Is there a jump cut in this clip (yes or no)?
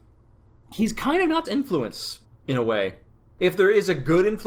yes